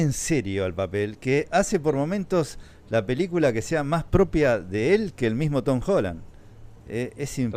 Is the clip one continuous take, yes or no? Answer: yes